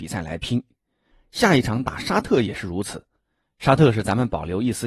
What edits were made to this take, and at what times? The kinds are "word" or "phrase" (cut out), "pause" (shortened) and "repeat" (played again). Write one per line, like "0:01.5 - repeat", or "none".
none